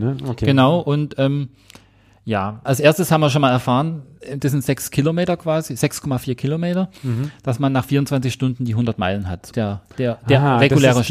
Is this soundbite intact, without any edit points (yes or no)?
no